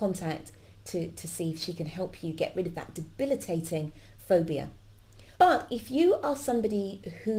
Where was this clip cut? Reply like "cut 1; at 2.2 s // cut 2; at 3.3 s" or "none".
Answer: cut 1; at 5.3 s